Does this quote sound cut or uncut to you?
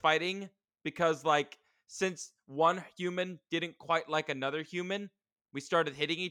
uncut